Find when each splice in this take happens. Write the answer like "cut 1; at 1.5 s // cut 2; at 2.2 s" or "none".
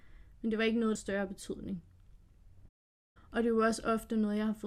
cut 1; at 1.0 s